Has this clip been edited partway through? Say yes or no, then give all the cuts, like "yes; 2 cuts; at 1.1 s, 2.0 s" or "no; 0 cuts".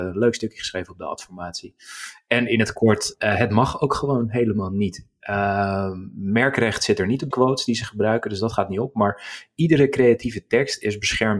yes; 1 cut; at 7.3 s